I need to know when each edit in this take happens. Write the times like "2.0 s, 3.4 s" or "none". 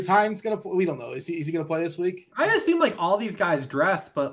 none